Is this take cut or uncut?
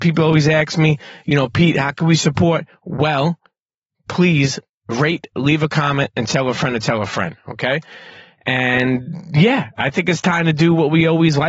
uncut